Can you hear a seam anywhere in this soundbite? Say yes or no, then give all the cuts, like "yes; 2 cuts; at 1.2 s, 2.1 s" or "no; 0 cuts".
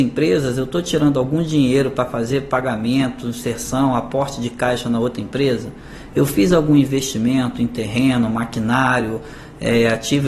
no; 0 cuts